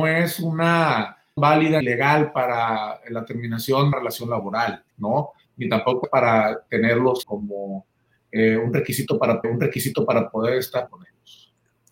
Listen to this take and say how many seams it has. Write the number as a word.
eight